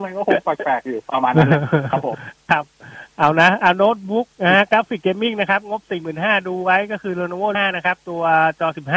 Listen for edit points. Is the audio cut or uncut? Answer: cut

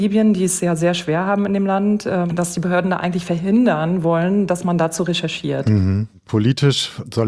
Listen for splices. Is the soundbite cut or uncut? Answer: uncut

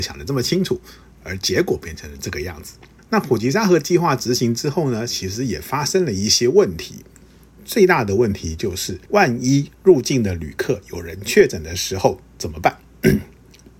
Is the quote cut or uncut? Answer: cut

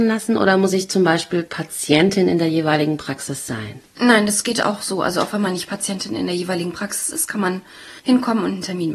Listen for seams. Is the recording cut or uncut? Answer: cut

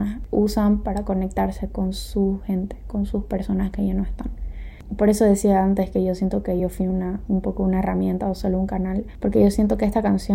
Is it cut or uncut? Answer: uncut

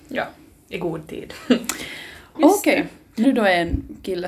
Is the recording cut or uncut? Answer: cut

